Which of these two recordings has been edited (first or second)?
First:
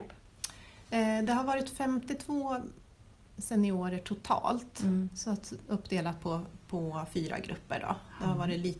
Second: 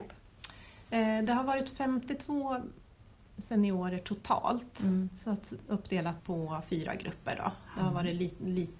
second